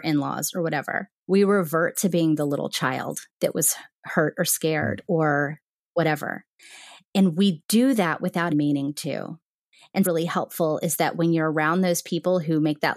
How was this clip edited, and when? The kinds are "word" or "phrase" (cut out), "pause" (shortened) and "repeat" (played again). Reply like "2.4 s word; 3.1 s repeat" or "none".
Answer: 1.2 s pause; 3.3 s pause; 8.5 s word; 10.0 s phrase